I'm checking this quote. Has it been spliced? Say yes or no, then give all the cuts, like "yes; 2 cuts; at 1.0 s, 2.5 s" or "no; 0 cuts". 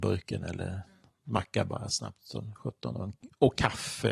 no; 0 cuts